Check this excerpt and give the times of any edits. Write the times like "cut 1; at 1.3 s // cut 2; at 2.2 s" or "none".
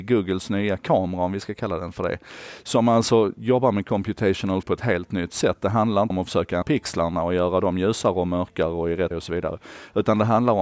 cut 1; at 4.6 s // cut 2; at 6.1 s // cut 3; at 6.6 s // cut 4; at 9.1 s